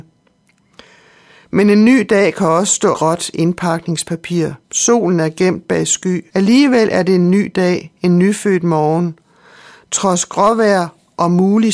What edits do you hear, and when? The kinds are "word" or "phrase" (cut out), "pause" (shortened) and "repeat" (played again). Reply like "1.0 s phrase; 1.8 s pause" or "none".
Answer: 2.9 s phrase; 4.6 s pause; 6.3 s pause